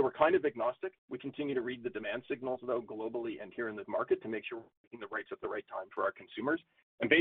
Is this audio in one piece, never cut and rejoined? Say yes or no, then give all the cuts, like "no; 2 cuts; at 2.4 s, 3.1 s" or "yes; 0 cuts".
no; 3 cuts; at 1.0 s, 3.8 s, 5.3 s